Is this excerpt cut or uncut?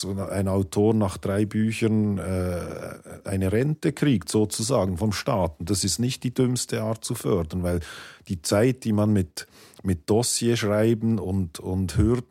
uncut